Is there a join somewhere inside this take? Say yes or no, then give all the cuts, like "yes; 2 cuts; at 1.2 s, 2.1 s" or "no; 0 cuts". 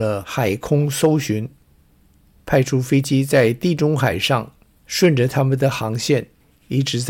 no; 0 cuts